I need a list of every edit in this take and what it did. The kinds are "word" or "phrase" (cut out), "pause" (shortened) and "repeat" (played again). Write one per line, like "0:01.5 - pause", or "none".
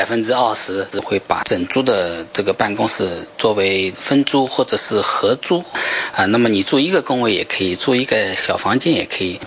0:00.9 - phrase